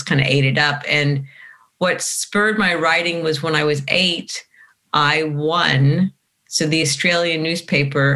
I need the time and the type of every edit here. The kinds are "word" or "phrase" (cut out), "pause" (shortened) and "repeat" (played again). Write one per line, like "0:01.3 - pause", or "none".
none

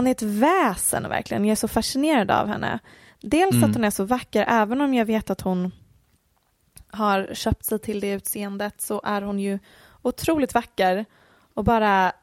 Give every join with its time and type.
none

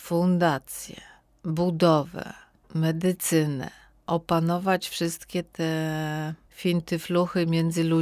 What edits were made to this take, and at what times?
none

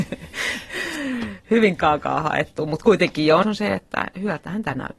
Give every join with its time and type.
0:03.4 - word

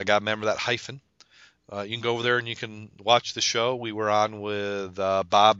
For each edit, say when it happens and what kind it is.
none

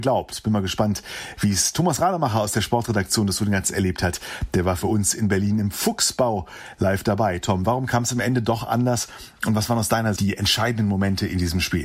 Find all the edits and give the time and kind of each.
0:03.6 - word
0:10.2 - word

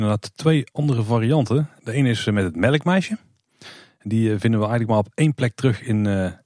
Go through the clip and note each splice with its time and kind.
none

